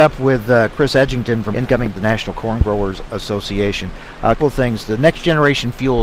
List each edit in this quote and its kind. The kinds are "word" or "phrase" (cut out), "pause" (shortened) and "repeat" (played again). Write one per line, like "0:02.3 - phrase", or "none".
0:01.5 - word
0:01.9 - word
0:04.4 - word

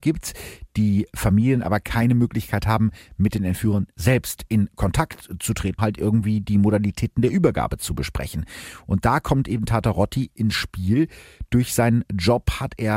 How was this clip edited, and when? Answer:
0:05.8 - word

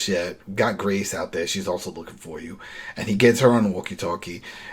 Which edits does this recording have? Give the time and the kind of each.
none

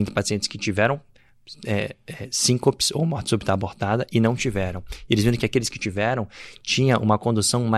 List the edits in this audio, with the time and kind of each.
none

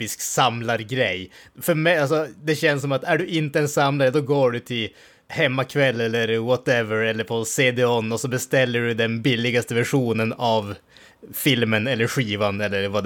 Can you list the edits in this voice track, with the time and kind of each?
none

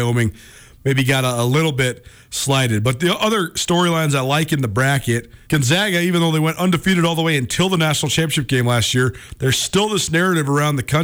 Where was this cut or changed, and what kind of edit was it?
0:05.4 - pause

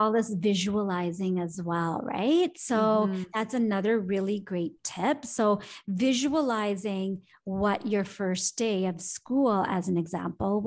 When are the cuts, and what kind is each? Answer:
none

